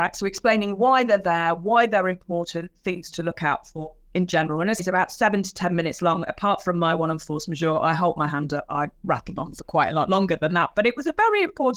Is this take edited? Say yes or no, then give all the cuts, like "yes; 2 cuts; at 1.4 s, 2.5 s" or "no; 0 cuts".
yes; 1 cut; at 4.8 s